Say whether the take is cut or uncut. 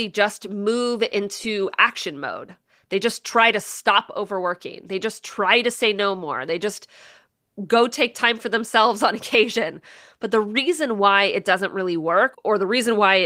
uncut